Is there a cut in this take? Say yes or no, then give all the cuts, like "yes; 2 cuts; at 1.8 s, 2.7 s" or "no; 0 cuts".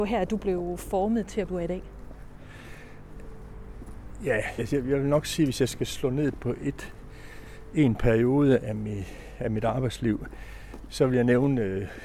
yes; 2 cuts; at 1.5 s, 4.6 s